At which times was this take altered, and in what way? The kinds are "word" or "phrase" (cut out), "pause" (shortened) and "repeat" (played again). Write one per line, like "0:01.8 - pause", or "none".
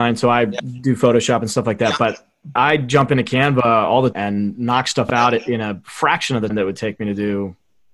0:02.6 - word
0:04.1 - word
0:06.5 - word